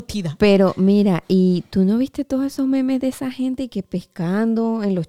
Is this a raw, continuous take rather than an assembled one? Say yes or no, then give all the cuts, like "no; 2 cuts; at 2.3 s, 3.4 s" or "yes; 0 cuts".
no; 1 cut; at 3.7 s